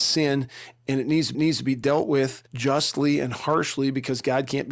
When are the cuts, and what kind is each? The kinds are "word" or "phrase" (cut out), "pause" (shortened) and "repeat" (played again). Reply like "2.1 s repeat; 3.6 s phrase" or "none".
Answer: 1.3 s repeat; 2.5 s pause